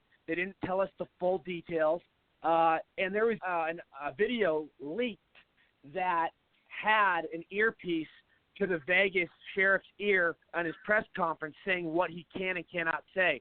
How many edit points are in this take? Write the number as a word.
two